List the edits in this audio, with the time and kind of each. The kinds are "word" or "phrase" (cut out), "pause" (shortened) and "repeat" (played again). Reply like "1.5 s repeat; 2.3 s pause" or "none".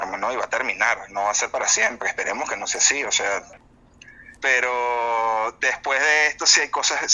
4.4 s pause